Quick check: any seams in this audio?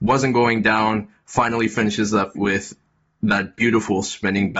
yes; 1 cut; at 2.4 s

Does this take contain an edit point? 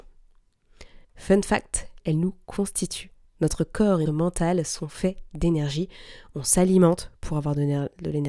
yes; 4 cuts; at 1.0 s, 2.0 s, 3.2 s, 4.1 s

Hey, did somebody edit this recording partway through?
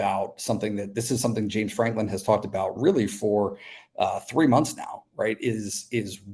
no; 0 cuts

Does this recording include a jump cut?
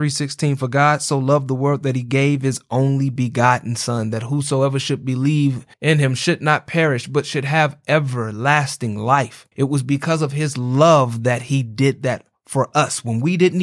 yes; 2 cuts; at 5.7 s, 9.5 s

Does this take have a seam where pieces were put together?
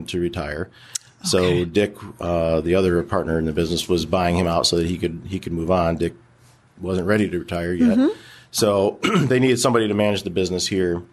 no; 0 cuts

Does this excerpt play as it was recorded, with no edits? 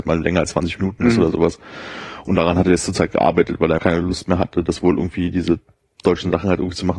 no; 1 cut; at 3.8 s

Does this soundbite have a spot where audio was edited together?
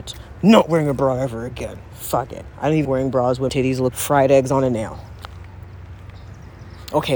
yes; 3 cuts; at 2.8 s, 3.5 s, 3.9 s

